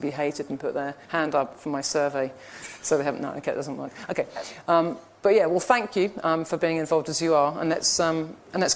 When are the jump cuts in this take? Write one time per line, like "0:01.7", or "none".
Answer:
0:01.0